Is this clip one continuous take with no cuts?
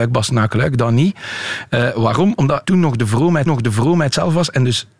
no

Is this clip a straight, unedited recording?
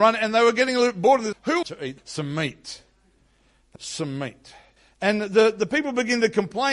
no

